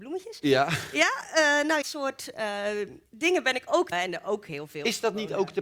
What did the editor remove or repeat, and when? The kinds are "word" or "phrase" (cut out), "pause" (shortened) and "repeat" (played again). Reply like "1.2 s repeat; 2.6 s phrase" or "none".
1.8 s phrase; 3.1 s pause; 3.9 s word

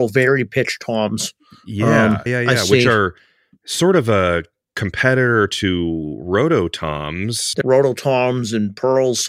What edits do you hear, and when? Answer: 2.3 s word; 7.6 s word

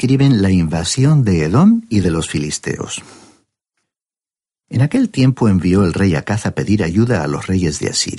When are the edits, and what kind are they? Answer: none

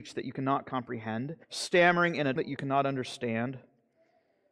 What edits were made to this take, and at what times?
1.4 s pause; 2.4 s word

